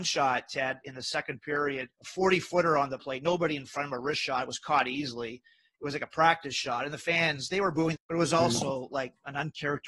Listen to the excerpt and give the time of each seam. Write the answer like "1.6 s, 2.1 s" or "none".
1.9 s, 3.0 s, 8.0 s